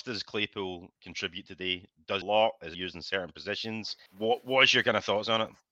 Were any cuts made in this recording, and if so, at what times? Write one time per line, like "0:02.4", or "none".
0:01.0
0:02.2
0:02.7
0:04.1